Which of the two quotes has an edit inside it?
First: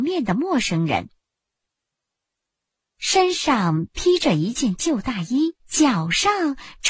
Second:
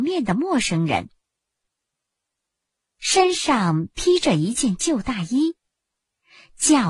first; 1 cut; at 5.6 s

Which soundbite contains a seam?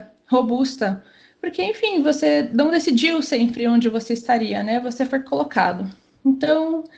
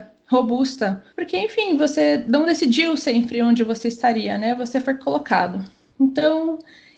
second; 1 cut; at 1.1 s

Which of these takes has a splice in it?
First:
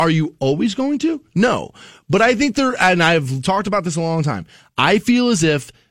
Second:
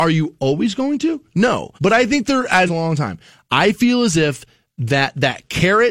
second; 2 cuts; at 1.8 s, 2.7 s

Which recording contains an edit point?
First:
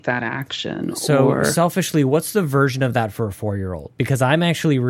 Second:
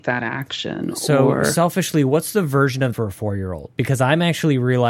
second; 1 cut; at 2.9 s

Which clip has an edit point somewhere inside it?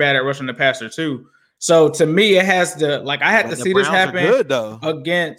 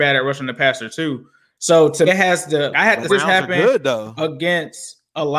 second; 3 cuts; at 2.1 s, 2.7 s, 3.1 s

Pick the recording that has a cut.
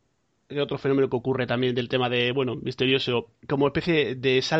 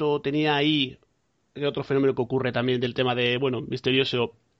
first; 1 cut; at 3.4 s

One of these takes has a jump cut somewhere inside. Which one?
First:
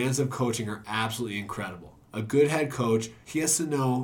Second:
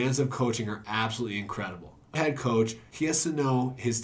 second; 1 cut; at 2.1 s

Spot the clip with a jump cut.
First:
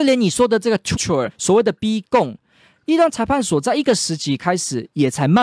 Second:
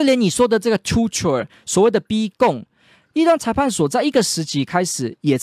first; 2 cuts; at 0.9 s, 1.3 s

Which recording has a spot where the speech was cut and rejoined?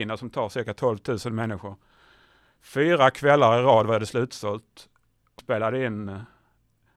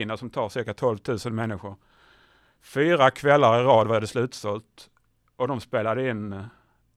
first; 1 cut; at 5.4 s

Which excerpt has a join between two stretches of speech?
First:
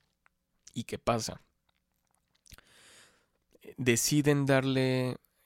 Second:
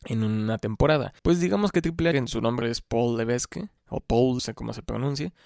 second; 5 cuts; at 1.2 s, 2.1 s, 2.6 s, 3.8 s, 4.4 s

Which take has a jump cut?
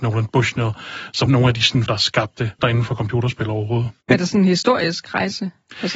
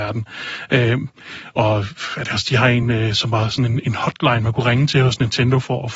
first; 4 cuts; at 1.3 s, 1.9 s, 2.6 s, 4.0 s

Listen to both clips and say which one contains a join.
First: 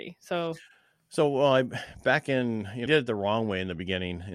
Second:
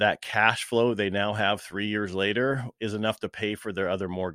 first; 1 cut; at 2.9 s

